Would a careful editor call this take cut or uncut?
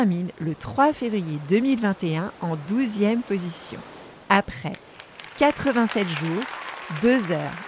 uncut